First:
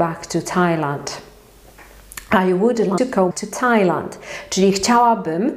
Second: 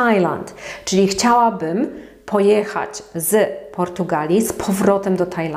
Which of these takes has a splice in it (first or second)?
first